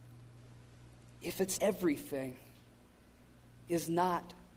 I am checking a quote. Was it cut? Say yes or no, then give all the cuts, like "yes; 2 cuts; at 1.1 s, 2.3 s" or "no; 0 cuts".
yes; 1 cut; at 1.6 s